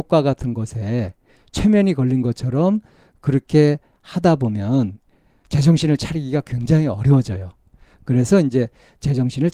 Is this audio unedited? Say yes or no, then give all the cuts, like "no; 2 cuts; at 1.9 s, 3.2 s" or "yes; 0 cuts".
yes; 0 cuts